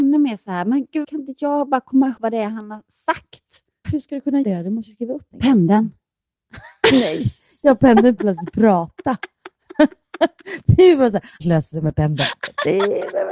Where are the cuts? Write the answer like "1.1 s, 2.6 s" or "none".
1.0 s, 2.2 s, 3.8 s, 4.4 s, 5.3 s, 8.2 s, 11.4 s